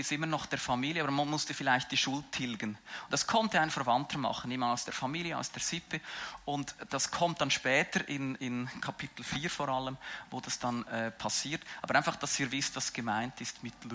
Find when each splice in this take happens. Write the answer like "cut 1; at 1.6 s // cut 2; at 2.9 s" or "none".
none